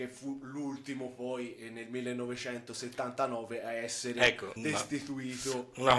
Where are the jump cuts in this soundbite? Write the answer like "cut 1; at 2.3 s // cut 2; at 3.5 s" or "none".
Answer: cut 1; at 4.6 s